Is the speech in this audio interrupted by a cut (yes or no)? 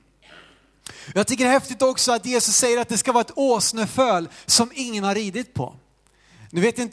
no